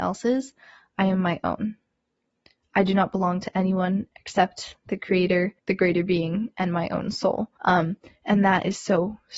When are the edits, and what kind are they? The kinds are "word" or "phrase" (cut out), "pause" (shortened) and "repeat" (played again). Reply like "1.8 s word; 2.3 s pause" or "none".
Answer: 5.6 s pause; 7.6 s pause